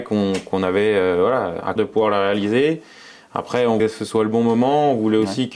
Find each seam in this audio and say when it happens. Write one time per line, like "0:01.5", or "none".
0:01.8
0:03.8